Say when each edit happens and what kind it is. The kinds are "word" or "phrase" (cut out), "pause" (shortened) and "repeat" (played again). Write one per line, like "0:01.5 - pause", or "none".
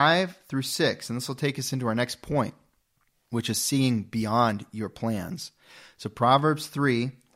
none